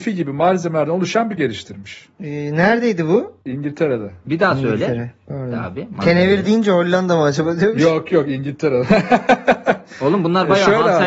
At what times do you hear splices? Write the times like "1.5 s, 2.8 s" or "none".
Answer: 1.4 s, 2.1 s, 3.4 s